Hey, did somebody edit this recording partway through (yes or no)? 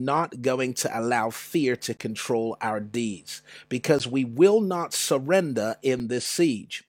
no